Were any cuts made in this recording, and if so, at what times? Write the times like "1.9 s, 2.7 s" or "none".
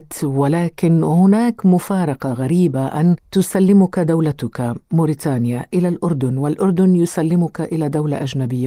3.2 s